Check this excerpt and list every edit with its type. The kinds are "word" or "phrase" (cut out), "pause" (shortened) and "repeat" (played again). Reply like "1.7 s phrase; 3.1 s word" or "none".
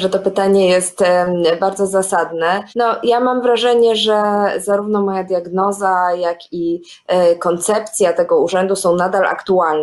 2.7 s pause